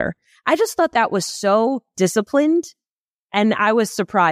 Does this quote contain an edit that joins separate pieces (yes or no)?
no